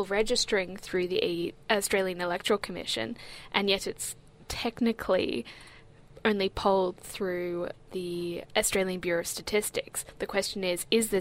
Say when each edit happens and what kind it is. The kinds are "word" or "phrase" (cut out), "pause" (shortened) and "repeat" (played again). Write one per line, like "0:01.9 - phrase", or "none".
0:08.5 - word